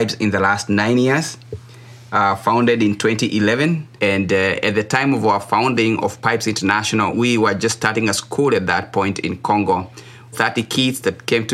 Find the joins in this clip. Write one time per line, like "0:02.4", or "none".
0:04.0
0:07.1
0:10.3

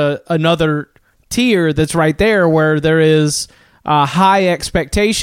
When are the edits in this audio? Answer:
none

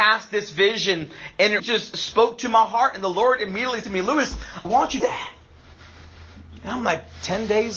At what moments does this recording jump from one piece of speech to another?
0:01.6
0:03.8
0:04.6
0:05.0

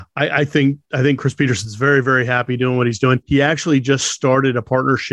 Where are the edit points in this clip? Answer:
none

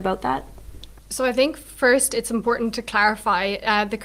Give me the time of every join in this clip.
0:01.0

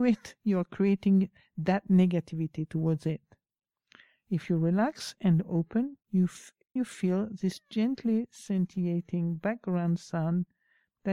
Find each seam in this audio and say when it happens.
0:06.0
0:06.8

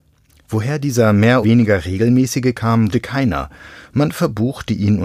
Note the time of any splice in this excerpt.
0:01.4
0:02.5
0:02.9

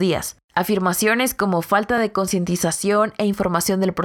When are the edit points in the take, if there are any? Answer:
none

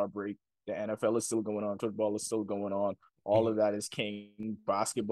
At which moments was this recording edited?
0:01.8

